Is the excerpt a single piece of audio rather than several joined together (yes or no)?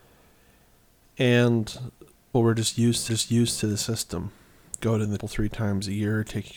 no